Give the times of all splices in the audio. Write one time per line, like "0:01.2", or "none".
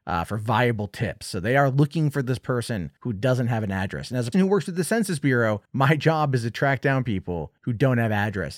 0:03.0
0:04.3
0:05.7
0:07.6